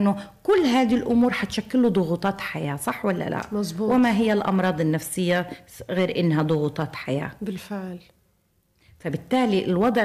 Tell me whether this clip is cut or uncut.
uncut